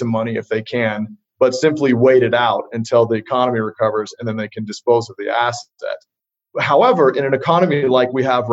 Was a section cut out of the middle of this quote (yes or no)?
no